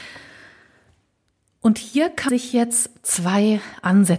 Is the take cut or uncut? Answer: cut